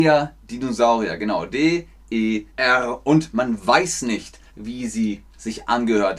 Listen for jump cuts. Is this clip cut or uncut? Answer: cut